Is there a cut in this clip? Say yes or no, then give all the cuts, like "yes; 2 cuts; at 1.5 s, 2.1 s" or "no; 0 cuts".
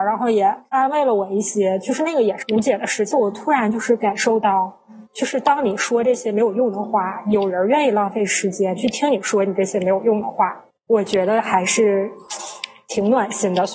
yes; 2 cuts; at 5.1 s, 10.7 s